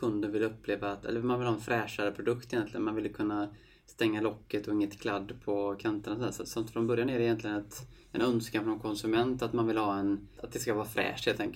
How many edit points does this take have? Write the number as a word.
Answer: one